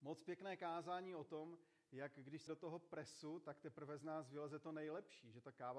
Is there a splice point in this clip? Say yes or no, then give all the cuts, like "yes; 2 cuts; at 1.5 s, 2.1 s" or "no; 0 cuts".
yes; 1 cut; at 2.5 s